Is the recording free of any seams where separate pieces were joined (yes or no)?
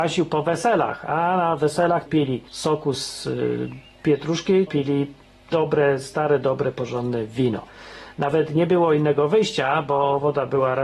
no